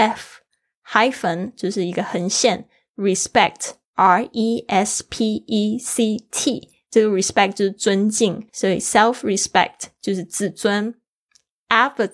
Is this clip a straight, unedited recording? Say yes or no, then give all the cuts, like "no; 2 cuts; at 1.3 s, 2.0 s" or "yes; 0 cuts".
no; 1 cut; at 8.5 s